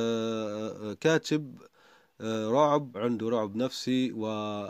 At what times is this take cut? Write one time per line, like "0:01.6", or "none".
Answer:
0:02.9